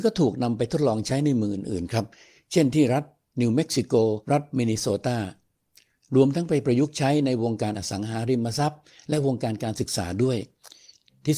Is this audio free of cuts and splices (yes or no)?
no